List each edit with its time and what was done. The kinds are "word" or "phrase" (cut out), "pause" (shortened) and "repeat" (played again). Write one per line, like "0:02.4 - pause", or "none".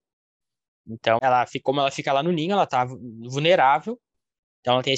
0:01.2 - word